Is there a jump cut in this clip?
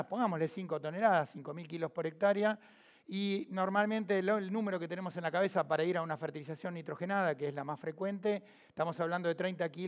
no; 0 cuts

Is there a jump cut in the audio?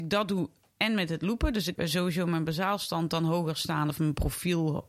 yes; 1 cut; at 1.8 s

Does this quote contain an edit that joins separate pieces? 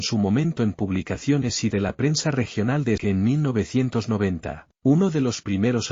yes; 3 cuts; at 1.7 s, 3.0 s, 4.7 s

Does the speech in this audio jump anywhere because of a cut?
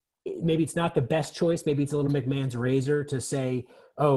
no; 0 cuts

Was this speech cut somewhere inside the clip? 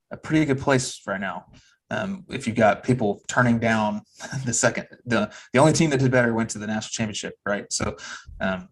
no; 0 cuts

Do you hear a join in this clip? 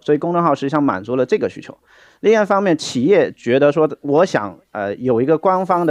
no; 0 cuts

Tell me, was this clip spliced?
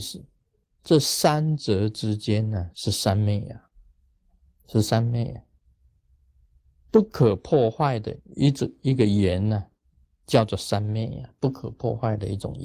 no; 0 cuts

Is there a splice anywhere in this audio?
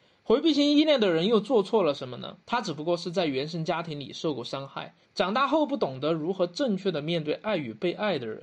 yes; 2 cuts; at 2.4 s, 5.0 s

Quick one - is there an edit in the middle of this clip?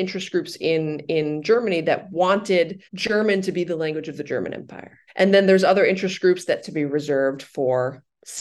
yes; 3 cuts; at 2.8 s, 5.1 s, 6.6 s

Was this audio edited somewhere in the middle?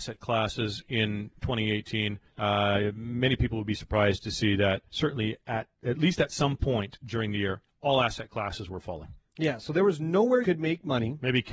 yes; 3 cuts; at 2.3 s, 4.9 s, 10.4 s

